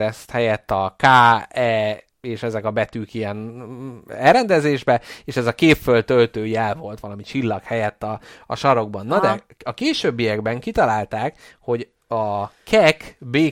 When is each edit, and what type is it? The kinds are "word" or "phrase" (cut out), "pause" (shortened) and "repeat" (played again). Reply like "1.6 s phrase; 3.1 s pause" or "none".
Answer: none